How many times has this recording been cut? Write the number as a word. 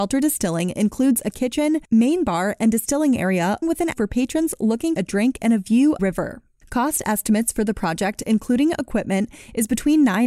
five